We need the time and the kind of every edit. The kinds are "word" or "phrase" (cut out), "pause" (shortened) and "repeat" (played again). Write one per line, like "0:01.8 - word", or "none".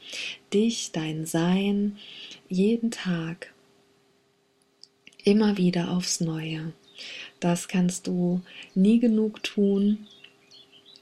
none